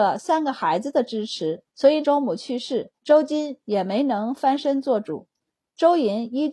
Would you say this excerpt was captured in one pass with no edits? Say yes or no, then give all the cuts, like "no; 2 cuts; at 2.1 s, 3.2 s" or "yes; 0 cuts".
no; 3 cuts; at 1.7 s, 2.0 s, 3.0 s